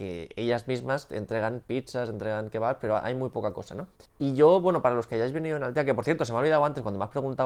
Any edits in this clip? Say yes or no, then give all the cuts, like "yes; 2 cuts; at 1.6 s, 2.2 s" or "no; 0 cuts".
yes; 1 cut; at 4.1 s